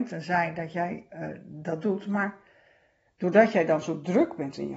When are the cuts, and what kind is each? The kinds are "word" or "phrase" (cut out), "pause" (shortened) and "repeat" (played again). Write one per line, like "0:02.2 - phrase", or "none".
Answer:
none